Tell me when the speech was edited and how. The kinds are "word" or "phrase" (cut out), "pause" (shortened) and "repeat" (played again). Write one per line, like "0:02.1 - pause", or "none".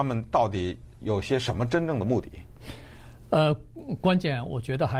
0:00.9 - pause